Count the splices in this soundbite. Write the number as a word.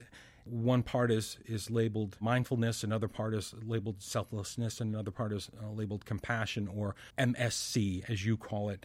one